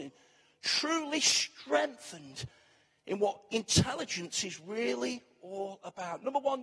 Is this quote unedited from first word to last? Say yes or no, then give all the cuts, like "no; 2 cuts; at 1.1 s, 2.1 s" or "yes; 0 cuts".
yes; 0 cuts